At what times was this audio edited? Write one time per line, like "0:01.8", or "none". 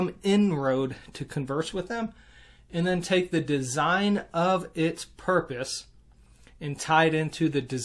none